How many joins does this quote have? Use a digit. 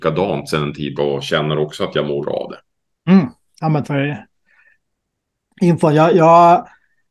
3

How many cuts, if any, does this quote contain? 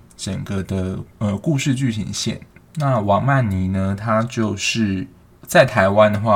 3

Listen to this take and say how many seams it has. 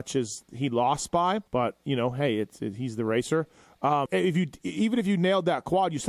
2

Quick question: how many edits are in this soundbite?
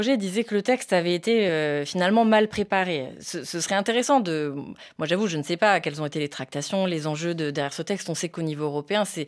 0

